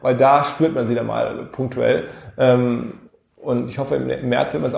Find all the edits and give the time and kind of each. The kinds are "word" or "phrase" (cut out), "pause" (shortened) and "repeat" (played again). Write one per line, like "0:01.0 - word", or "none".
none